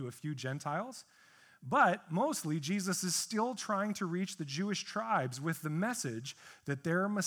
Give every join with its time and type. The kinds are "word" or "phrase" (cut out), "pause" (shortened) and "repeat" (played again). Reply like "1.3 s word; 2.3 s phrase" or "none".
none